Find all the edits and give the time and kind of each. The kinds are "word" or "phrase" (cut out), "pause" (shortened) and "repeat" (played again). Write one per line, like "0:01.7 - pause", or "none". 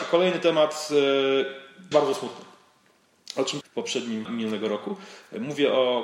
0:01.9 - phrase
0:03.6 - phrase
0:04.2 - phrase

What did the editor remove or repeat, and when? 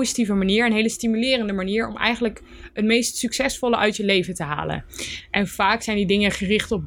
none

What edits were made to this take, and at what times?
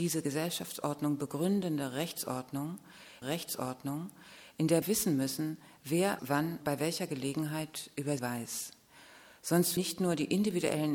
0:03.2 - repeat
0:04.8 - word
0:06.2 - word
0:06.6 - word
0:08.2 - word
0:09.8 - word

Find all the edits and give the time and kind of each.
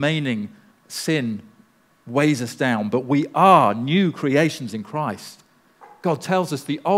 none

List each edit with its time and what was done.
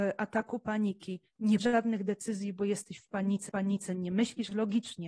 0:01.6 - word
0:03.5 - repeat

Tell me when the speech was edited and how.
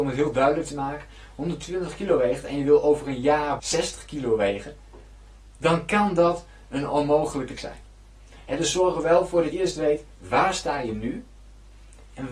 0:03.6 - word
0:07.6 - word
0:09.5 - word

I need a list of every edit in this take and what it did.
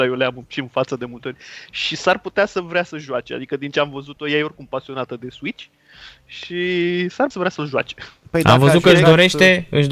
0:07.3 - word

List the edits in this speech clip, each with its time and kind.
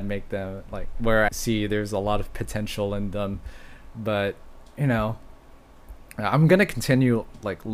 0:01.3 - word
0:03.9 - word
0:06.1 - pause

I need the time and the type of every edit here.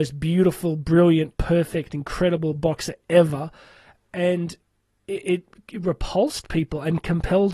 none

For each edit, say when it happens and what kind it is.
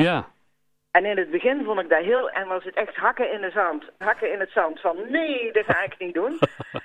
0:02.3 - word
0:04.0 - word

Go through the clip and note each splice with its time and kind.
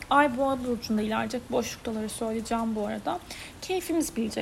none

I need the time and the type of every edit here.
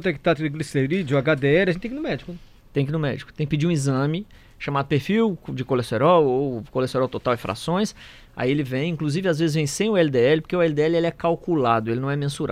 none

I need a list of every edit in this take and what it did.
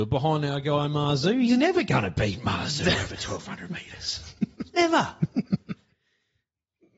0:04.4 - pause

